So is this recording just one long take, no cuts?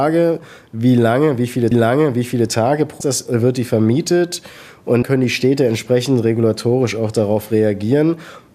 no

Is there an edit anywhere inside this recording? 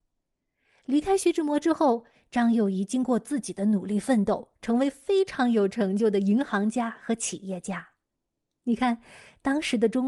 no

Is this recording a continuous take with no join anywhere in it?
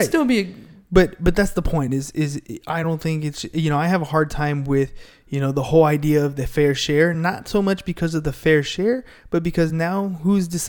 yes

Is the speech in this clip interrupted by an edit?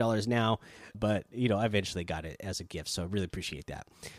yes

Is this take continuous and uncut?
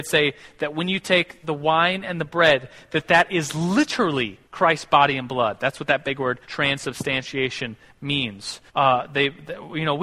no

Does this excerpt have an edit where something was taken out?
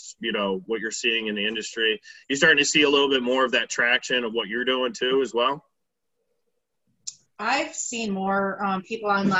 no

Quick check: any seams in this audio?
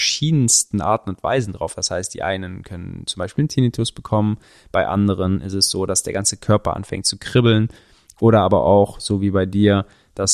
no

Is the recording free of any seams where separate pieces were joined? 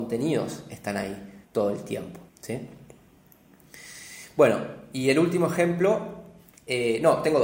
no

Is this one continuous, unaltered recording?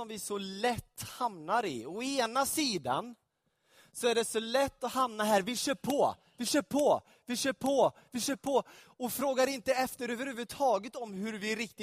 yes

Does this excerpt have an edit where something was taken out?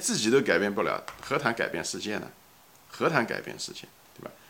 no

